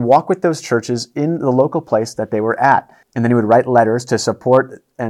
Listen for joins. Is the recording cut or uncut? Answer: cut